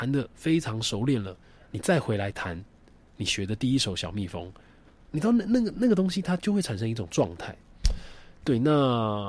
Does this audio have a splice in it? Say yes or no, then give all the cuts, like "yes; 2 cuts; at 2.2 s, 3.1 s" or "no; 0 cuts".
no; 0 cuts